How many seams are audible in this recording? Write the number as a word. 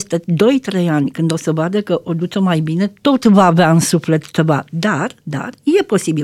zero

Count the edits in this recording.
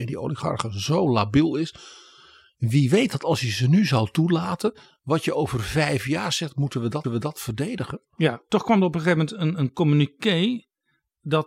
one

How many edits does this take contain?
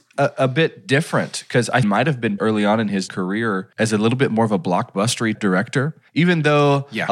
six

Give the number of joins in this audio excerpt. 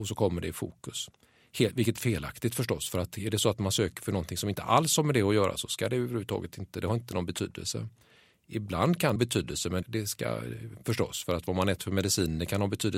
three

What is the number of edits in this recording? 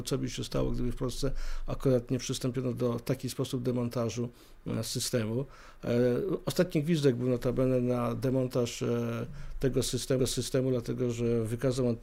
one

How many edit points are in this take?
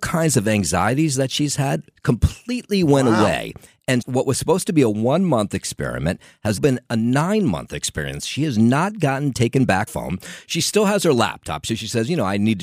three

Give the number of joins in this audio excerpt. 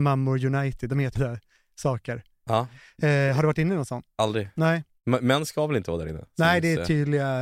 one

